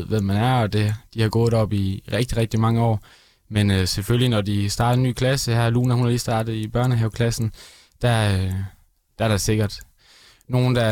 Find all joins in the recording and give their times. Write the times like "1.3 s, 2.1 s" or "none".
none

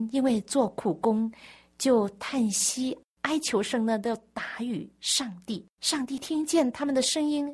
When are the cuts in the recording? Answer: 5.7 s

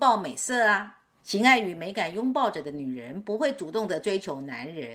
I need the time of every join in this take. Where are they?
none

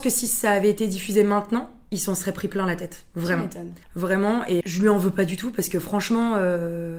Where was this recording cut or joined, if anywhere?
3.8 s, 4.6 s

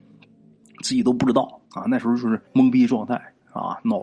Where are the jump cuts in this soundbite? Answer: 1.6 s, 2.5 s

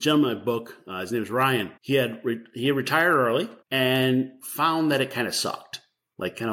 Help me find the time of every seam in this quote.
1.8 s, 3.6 s

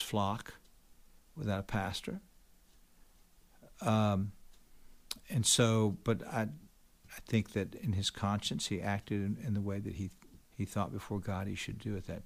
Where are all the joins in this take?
10.4 s

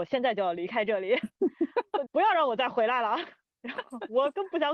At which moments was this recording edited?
2.1 s

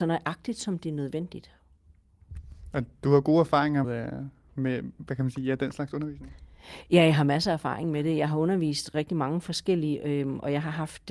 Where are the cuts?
3.8 s, 8.9 s

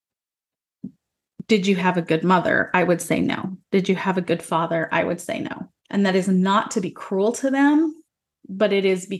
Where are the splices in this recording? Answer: 3.6 s, 5.8 s

